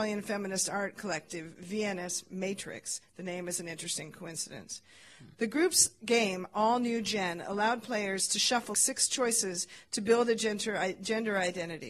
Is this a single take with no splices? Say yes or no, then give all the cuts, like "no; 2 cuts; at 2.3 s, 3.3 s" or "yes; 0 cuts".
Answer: no; 1 cut; at 8.7 s